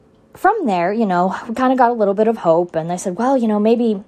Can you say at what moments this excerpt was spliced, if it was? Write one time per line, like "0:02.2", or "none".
none